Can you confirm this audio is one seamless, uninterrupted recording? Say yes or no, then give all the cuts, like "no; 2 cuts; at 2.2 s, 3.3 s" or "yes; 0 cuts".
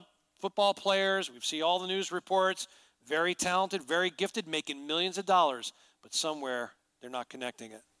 yes; 0 cuts